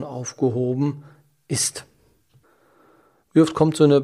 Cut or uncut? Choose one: uncut